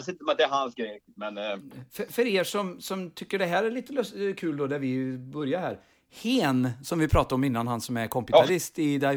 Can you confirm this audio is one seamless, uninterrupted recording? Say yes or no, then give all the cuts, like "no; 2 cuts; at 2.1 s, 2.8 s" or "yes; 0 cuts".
yes; 0 cuts